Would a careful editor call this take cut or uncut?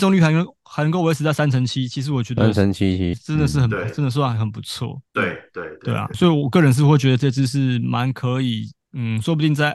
cut